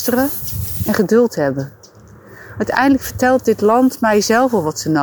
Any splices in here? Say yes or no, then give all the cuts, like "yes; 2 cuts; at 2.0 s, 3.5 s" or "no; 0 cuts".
no; 0 cuts